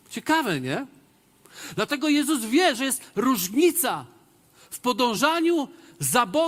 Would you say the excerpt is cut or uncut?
uncut